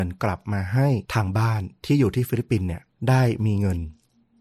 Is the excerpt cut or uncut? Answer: cut